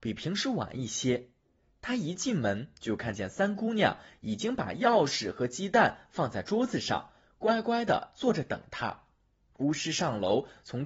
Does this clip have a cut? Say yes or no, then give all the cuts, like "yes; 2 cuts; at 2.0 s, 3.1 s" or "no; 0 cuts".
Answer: no; 0 cuts